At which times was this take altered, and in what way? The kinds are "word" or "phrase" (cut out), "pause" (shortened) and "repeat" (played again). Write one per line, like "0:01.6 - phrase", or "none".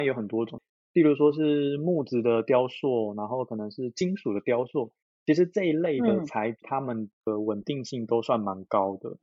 0:06.6 - word